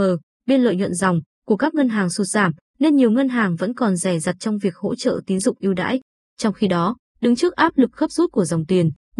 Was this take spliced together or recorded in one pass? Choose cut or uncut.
uncut